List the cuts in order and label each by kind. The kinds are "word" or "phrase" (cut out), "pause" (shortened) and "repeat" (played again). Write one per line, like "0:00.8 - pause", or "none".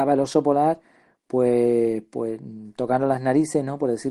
none